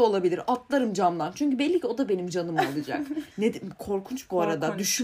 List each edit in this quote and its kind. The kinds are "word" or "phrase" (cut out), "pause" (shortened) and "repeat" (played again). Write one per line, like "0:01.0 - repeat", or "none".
0:03.3 - pause